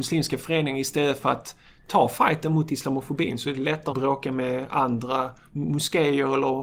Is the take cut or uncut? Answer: cut